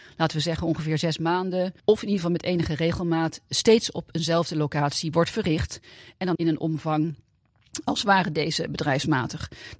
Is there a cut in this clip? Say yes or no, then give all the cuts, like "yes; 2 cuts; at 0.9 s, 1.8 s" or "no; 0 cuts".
yes; 2 cuts; at 1.8 s, 6.3 s